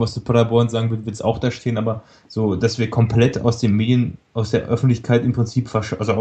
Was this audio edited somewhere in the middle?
no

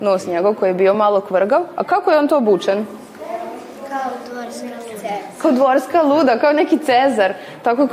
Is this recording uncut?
yes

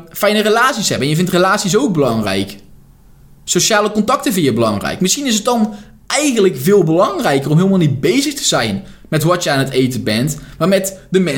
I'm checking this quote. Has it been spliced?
no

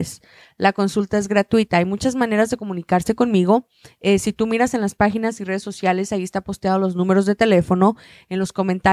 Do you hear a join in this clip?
no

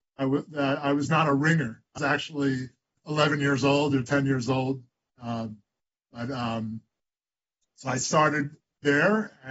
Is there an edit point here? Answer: yes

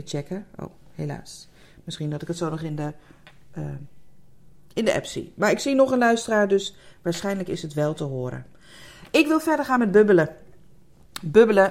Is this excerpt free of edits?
yes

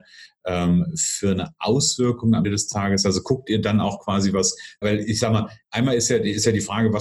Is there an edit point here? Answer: yes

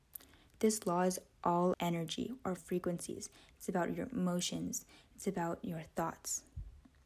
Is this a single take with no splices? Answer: no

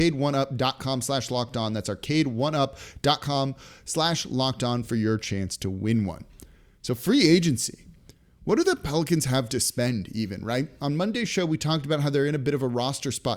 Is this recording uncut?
yes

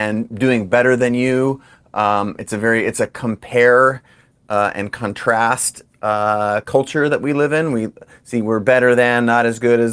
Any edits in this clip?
no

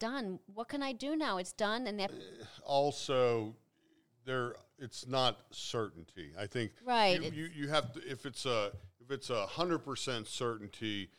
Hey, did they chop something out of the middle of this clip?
yes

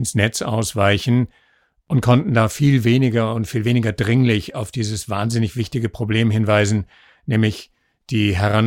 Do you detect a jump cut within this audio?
no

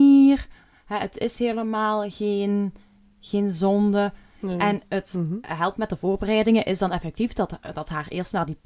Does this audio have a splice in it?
no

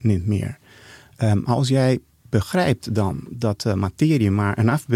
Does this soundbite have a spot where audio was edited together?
no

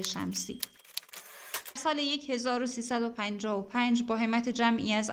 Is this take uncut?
no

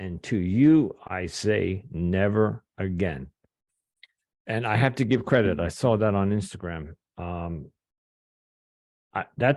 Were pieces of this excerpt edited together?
no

